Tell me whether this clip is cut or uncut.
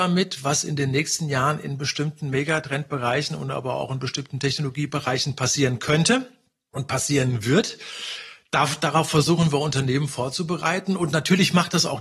uncut